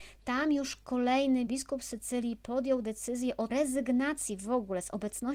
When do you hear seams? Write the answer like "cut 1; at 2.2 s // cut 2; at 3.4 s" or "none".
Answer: cut 1; at 1.5 s // cut 2; at 3.5 s